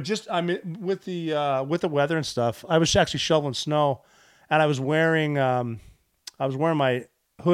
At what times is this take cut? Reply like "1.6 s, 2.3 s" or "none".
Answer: none

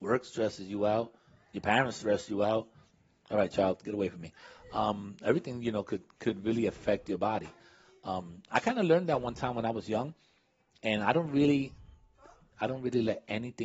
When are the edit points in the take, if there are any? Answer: none

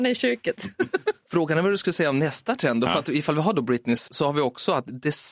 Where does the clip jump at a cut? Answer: 4.1 s

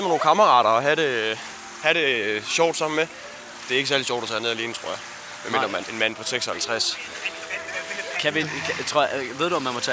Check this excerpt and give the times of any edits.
5.8 s

